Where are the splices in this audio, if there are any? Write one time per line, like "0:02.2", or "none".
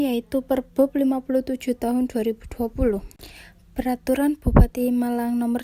none